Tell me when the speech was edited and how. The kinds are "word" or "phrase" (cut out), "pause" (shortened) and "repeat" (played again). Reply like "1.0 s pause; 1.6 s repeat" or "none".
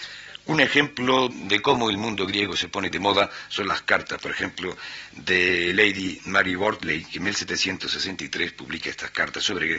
1.3 s word; 2.9 s word